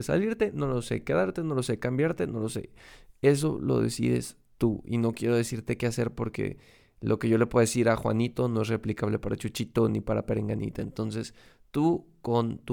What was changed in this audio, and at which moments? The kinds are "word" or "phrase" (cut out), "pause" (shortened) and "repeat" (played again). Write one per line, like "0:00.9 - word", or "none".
none